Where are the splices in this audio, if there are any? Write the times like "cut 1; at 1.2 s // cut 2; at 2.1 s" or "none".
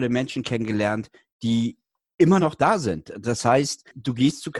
none